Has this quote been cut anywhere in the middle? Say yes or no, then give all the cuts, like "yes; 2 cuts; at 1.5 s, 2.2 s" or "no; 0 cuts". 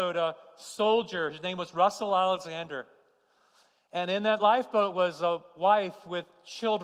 no; 0 cuts